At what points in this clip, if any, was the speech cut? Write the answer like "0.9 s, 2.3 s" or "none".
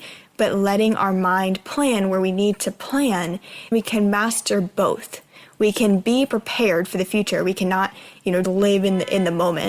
3.7 s, 8.4 s

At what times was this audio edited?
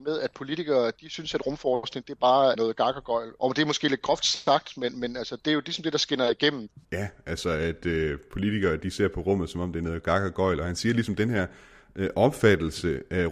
6.8 s

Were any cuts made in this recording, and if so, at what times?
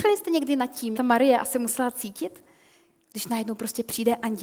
0.9 s

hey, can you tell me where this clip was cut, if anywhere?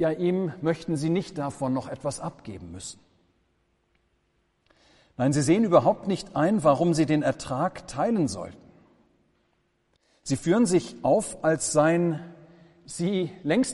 none

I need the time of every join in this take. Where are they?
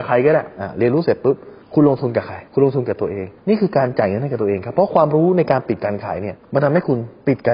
1.6 s, 2.5 s, 3.4 s, 6.4 s

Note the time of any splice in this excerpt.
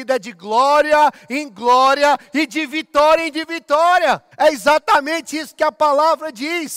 4.3 s

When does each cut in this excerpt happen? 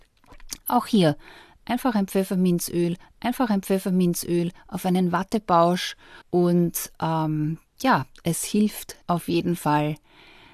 3.0 s, 6.2 s, 9.0 s

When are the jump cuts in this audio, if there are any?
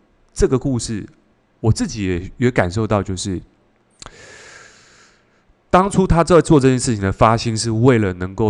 none

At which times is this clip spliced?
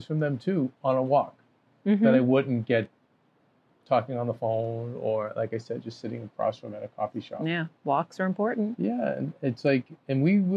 none

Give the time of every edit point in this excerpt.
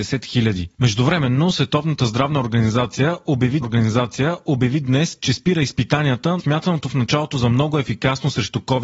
3.6 s, 6.4 s

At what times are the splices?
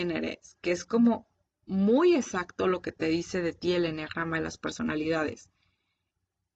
none

